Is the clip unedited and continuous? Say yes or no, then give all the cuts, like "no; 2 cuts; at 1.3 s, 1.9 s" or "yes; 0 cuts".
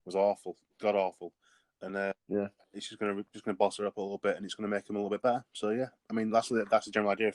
yes; 0 cuts